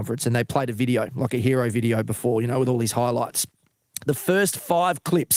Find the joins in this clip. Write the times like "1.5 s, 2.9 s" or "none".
none